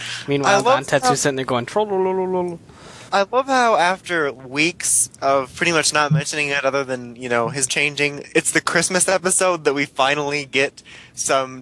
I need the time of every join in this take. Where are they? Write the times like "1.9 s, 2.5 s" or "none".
3.1 s, 7.7 s